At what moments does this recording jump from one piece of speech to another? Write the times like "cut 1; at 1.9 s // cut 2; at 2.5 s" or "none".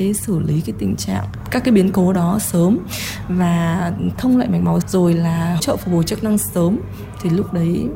cut 1; at 4.2 s // cut 2; at 4.8 s // cut 3; at 5.6 s